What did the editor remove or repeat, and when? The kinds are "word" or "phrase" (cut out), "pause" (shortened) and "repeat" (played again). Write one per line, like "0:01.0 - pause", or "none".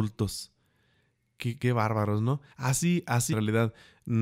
0:01.6 - word
0:02.5 - pause
0:03.3 - phrase